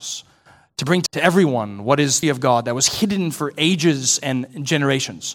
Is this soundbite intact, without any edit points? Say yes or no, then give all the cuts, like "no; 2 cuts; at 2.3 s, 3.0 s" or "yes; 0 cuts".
no; 2 cuts; at 1.1 s, 2.2 s